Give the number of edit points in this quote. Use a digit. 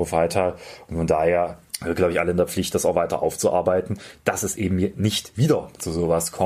1